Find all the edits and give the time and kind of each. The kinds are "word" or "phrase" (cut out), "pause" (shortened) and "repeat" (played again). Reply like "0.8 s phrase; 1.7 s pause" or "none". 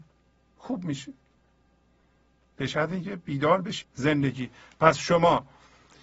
3.8 s word